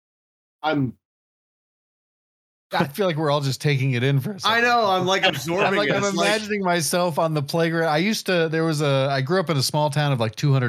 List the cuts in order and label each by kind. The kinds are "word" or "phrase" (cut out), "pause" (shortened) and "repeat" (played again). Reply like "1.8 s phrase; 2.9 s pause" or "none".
none